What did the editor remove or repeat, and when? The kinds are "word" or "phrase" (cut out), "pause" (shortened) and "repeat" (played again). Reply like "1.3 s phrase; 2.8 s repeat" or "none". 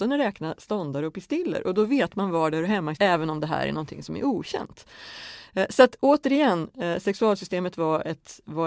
3.0 s word